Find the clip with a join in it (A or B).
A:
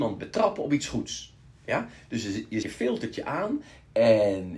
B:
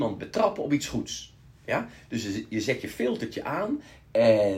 A